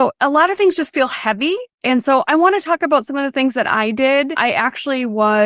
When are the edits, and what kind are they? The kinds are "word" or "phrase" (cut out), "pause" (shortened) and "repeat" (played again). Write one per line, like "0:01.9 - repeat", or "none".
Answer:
0:01.7 - pause